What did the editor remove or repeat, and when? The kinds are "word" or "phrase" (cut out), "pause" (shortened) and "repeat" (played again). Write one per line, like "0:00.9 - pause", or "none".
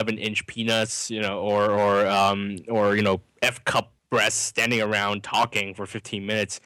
0:03.3 - pause
0:04.0 - pause